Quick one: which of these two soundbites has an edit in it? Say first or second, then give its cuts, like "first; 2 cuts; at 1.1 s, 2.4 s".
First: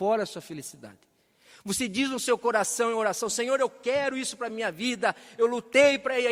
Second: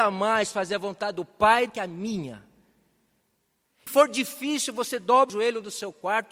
second; 3 cuts; at 1.7 s, 3.9 s, 5.3 s